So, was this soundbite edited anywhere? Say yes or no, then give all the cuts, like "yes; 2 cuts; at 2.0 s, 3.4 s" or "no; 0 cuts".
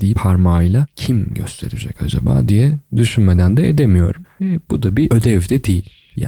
no; 0 cuts